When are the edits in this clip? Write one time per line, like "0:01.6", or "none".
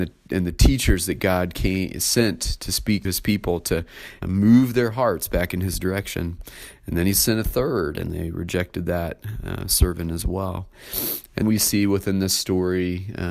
0:03.0
0:04.2
0:11.4